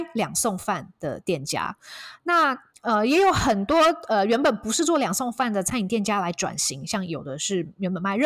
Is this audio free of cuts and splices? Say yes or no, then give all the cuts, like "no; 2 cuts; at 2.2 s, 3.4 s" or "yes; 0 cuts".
no; 1 cut; at 2.7 s